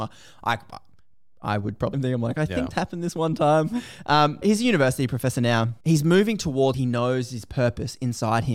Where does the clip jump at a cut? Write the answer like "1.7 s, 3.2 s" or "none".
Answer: 1.9 s, 2.7 s, 4.4 s, 5.8 s, 6.7 s